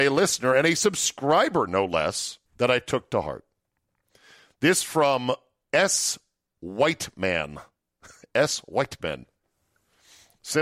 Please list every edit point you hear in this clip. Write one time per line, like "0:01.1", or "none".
0:02.5